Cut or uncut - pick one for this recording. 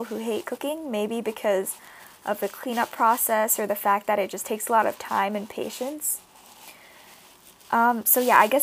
uncut